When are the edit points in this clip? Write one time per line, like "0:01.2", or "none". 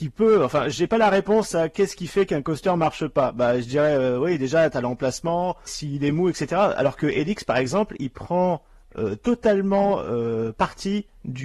0:05.7

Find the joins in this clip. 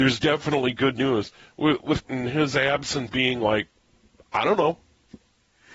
0:02.0
0:03.1

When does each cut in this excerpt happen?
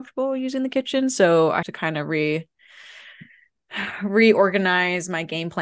0:01.6

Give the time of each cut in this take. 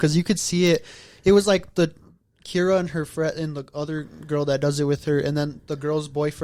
none

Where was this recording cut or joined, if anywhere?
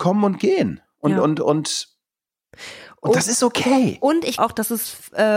0:04.4

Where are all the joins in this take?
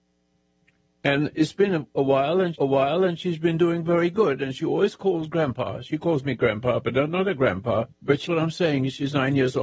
0:02.5
0:07.9
0:08.3

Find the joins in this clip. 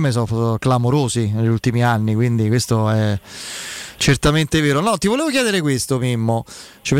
none

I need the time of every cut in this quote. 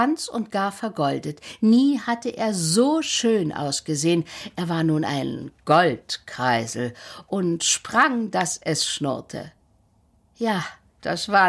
none

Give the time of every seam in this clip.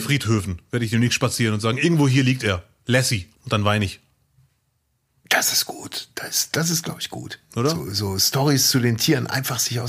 0:03.4

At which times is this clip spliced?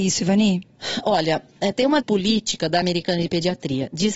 0:02.0
0:02.8

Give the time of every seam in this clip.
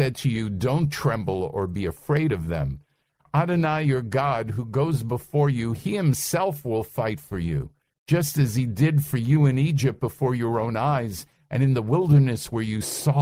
none

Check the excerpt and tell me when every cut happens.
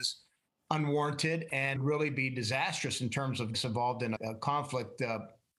0:01.8
0:03.5
0:04.2

